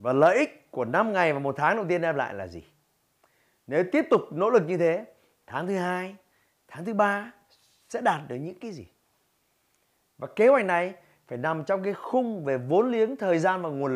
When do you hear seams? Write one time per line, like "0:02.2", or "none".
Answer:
none

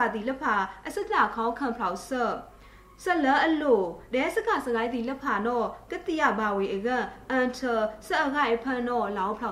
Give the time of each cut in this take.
none

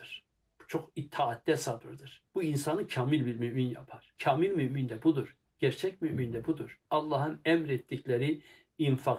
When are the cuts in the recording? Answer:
0:02.3
0:04.2
0:06.9

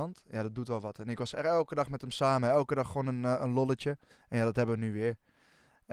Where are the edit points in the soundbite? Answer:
0:04.1

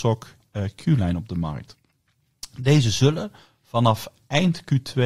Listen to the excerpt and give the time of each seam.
none

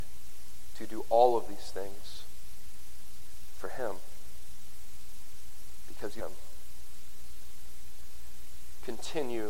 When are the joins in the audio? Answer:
0:06.2

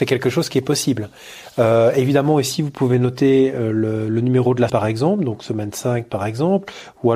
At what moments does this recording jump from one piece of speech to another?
0:04.7

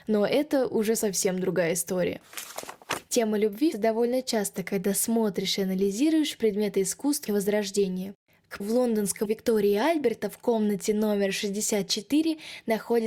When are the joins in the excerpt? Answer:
0:03.7
0:07.3
0:08.6
0:09.3

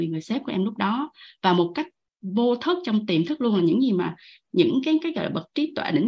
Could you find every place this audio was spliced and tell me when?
none

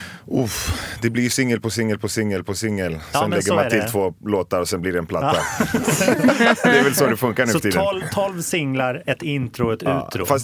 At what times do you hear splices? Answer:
none

